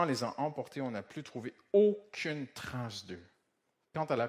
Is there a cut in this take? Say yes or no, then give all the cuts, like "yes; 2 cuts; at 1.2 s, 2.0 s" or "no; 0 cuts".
no; 0 cuts